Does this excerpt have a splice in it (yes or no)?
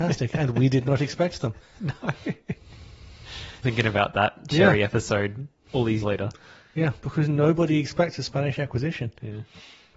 yes